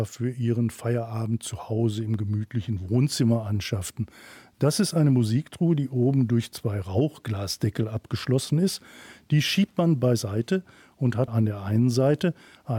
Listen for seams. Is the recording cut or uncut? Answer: uncut